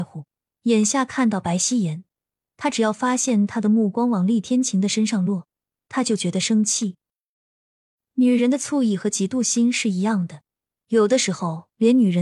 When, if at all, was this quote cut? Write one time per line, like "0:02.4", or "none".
none